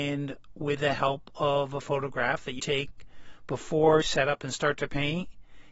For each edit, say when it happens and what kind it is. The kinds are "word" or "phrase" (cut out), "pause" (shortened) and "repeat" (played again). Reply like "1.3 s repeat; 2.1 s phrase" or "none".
2.6 s word; 4.0 s word